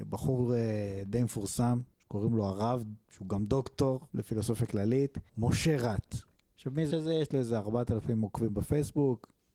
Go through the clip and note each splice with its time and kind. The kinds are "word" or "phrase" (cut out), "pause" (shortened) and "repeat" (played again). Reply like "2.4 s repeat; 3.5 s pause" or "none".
1.9 s pause; 4.1 s pause; 5.3 s pause; 6.9 s word